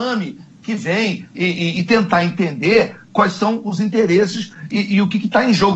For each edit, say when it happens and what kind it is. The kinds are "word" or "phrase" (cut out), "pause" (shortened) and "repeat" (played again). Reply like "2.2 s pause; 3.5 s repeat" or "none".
none